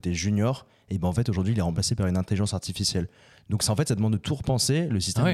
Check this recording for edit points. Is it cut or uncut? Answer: uncut